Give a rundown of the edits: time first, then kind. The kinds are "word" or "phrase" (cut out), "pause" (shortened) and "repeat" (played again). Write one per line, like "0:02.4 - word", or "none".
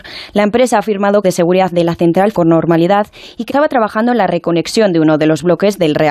0:01.2 - phrase
0:02.3 - word
0:03.5 - word